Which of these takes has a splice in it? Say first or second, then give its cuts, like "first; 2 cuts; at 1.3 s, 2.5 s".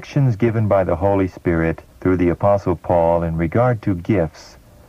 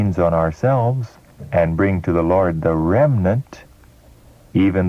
first; 1 cut; at 1.9 s